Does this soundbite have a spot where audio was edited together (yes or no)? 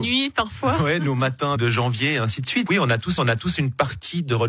yes